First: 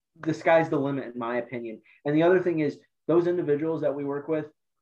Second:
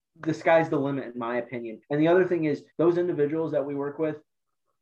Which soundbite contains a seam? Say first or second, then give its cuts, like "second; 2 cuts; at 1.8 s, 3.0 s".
second; 2 cuts; at 1.8 s, 2.7 s